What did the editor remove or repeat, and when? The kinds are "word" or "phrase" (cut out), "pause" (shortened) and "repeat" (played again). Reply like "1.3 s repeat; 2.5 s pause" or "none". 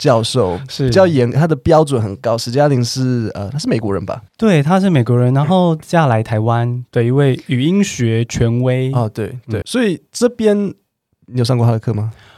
4.3 s pause; 9.6 s word